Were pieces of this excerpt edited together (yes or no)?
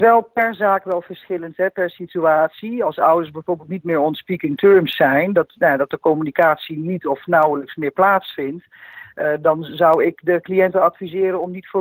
no